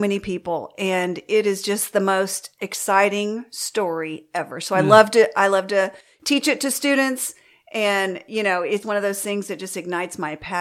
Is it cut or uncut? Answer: cut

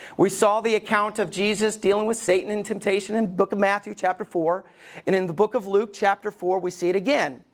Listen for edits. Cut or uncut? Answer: uncut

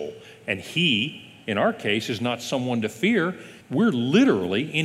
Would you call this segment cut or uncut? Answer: cut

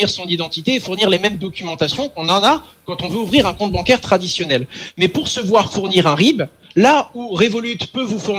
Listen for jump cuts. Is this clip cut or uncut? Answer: uncut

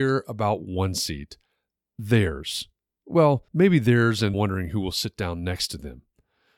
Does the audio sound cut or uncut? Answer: cut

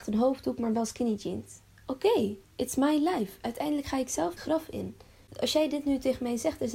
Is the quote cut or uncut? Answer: cut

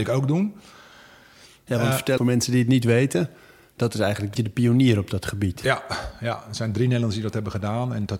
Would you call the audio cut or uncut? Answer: cut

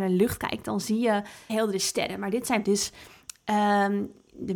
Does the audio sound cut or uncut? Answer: cut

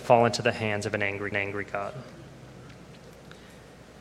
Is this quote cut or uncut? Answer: cut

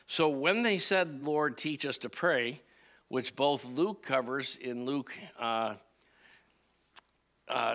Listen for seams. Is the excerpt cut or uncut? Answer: uncut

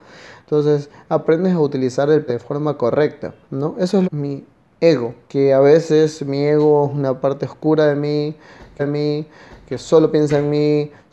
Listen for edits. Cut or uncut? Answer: cut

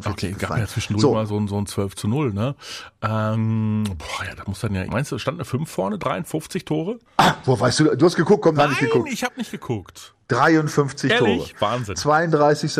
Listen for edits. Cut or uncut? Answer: cut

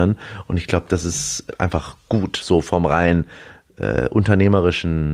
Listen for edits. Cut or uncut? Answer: uncut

